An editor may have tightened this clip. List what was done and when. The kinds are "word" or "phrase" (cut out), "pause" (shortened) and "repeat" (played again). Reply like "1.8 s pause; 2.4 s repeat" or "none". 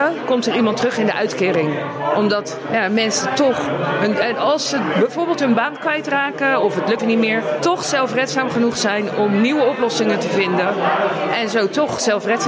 7.0 s word